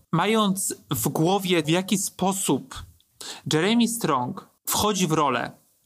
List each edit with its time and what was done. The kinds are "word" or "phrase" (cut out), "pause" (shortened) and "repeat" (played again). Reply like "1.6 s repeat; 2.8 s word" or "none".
1.6 s word